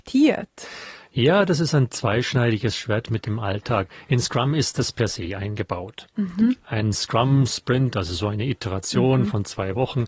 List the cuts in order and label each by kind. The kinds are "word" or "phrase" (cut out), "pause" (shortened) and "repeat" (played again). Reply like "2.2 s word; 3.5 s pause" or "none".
none